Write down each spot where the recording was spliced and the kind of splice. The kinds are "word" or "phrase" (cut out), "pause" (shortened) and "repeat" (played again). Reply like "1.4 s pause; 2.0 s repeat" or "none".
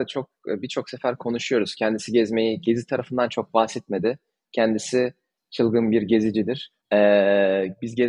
6.8 s pause